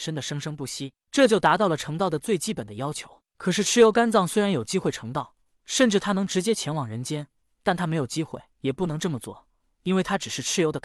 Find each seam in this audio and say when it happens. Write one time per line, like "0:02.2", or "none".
0:08.5